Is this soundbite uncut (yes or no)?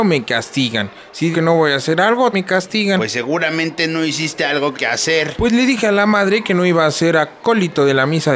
no